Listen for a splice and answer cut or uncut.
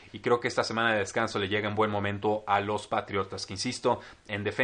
uncut